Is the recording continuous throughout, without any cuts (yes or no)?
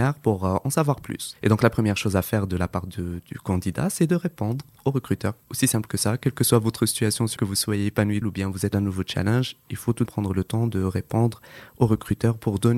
no